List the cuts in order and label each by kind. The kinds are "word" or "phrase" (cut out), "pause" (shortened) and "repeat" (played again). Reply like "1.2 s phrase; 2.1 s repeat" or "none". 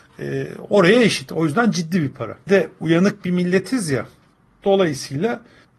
2.5 s word